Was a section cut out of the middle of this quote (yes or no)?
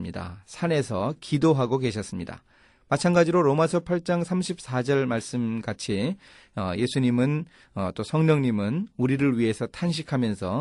no